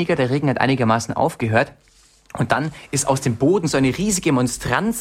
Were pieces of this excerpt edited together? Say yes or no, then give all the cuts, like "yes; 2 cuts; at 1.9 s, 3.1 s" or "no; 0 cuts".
no; 0 cuts